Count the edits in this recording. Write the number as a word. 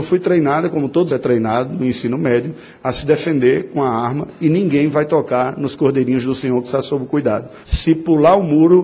two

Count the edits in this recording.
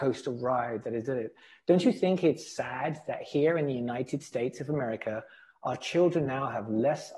zero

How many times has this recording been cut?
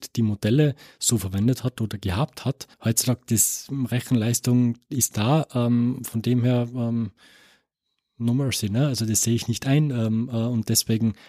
one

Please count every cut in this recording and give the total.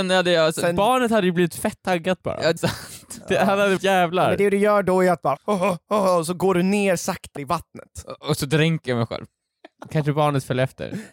four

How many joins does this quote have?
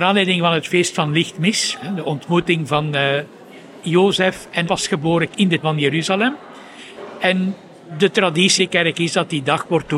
five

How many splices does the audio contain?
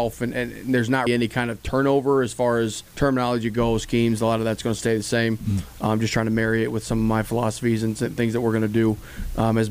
two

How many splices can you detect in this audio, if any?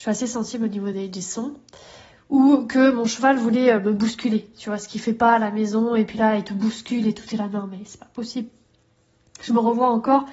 zero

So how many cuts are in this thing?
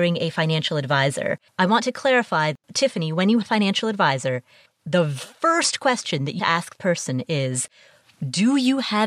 six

